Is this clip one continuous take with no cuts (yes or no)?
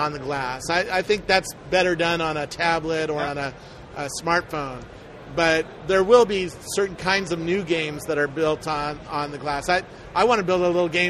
yes